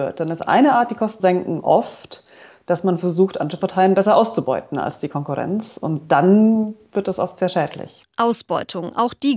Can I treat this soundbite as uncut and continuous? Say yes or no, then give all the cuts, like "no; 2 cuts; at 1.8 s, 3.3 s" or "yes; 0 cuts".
no; 1 cut; at 1.2 s